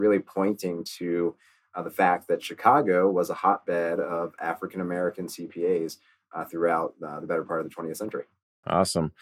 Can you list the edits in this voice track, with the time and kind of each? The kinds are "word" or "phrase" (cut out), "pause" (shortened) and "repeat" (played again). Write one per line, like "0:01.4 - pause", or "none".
none